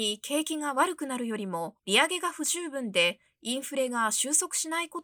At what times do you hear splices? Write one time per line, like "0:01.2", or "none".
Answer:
0:01.8